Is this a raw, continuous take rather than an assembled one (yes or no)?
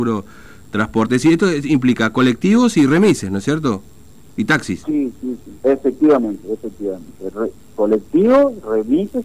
no